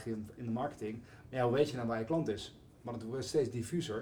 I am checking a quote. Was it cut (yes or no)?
no